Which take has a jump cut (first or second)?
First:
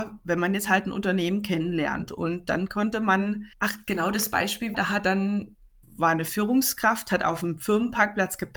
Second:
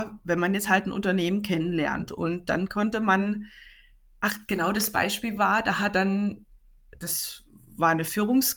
first